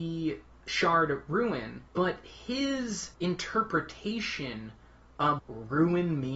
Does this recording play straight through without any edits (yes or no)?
no